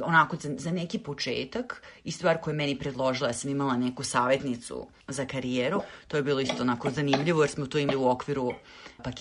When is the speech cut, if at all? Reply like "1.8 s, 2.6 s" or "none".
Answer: none